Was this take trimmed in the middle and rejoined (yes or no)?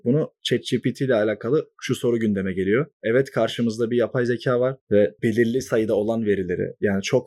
no